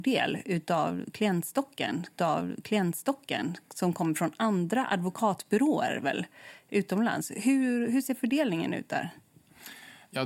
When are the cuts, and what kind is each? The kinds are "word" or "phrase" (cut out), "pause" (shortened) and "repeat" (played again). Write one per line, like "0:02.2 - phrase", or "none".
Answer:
0:02.2 - repeat